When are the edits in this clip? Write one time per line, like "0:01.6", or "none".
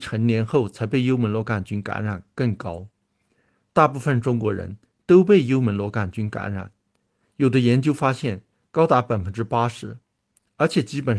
none